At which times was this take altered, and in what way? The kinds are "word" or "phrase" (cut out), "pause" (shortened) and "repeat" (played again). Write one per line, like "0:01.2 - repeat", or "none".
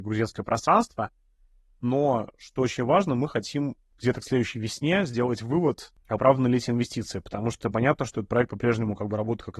none